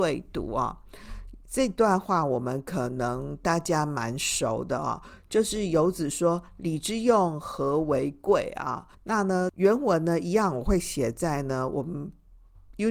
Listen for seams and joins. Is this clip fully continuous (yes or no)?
no